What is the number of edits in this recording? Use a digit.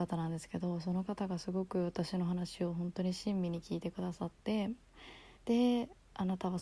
1